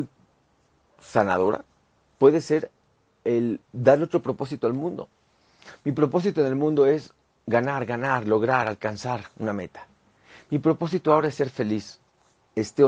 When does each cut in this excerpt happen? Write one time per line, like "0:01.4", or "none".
none